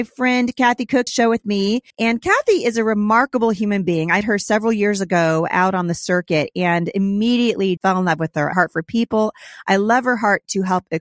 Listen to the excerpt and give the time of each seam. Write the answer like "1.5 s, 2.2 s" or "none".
1.1 s, 1.9 s, 4.2 s, 7.8 s, 8.5 s